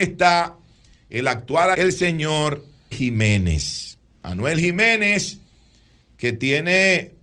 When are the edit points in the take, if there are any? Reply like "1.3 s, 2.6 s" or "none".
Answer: 1.7 s, 2.9 s